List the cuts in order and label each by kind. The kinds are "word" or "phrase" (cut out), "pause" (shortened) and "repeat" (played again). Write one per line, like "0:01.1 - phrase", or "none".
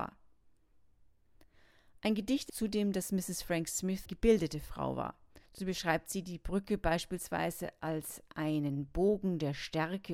0:02.5 - phrase
0:04.1 - word
0:05.5 - pause